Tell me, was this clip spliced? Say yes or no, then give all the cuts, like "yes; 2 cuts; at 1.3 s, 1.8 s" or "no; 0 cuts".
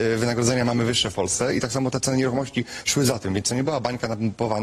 no; 0 cuts